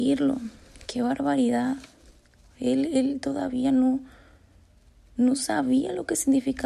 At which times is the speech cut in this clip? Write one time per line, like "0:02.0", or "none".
none

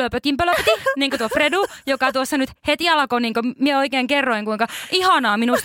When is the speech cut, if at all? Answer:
none

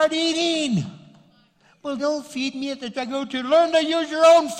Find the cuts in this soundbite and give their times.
0:02.0
0:02.9

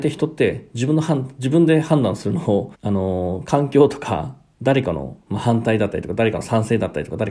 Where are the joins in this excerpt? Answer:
0:02.7

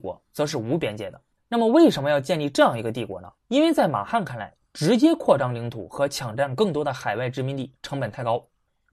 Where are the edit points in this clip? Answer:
0:01.3
0:03.4

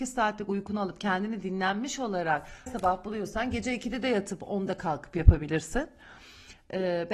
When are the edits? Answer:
0:02.7

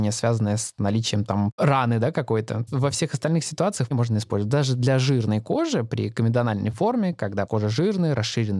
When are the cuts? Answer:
0:02.7
0:03.9
0:07.5

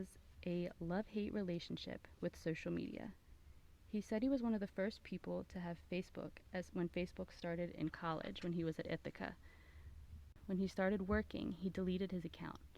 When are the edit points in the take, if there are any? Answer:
none

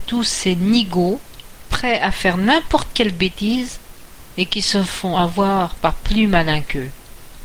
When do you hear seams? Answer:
none

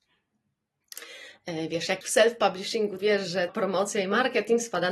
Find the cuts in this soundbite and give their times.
0:02.0
0:03.0
0:03.5

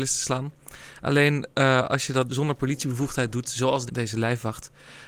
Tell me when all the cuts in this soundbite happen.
0:02.3
0:03.9

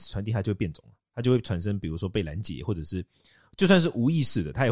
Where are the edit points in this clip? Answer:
none

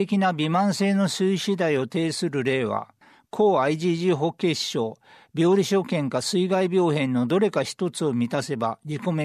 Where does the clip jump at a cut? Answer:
none

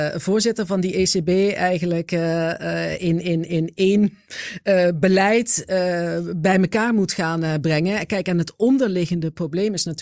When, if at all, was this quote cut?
none

